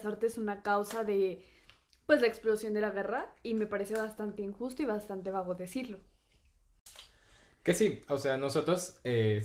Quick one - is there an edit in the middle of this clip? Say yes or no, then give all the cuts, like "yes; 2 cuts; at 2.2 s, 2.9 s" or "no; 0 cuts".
no; 0 cuts